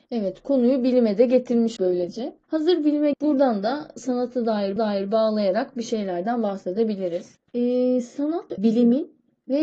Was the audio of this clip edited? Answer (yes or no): yes